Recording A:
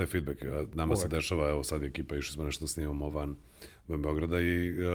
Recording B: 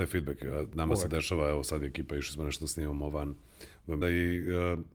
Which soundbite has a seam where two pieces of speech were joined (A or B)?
B